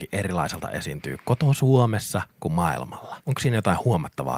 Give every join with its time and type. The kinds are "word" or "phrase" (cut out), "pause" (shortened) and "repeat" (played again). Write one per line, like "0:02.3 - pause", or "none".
0:03.2 - pause